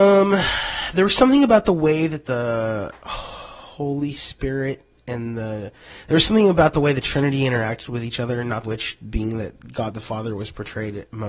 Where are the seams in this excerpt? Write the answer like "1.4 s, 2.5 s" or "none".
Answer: 8.6 s